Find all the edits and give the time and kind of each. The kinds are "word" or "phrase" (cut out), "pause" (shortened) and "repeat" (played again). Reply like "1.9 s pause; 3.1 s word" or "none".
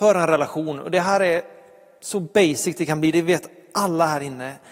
none